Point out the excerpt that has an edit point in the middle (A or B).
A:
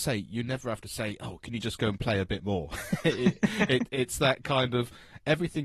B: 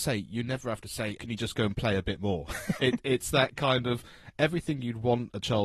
B